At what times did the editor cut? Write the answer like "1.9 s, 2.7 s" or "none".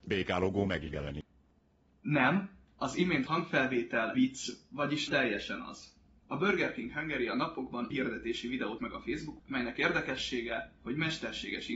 3.3 s, 4.1 s, 5.1 s, 7.9 s, 8.8 s, 9.4 s